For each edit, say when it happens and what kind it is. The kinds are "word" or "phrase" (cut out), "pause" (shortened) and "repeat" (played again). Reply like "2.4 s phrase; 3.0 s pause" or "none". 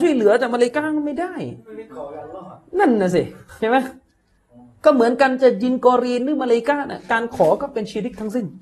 none